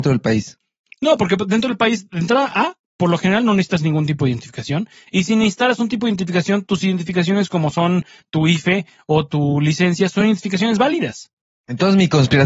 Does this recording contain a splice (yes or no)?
no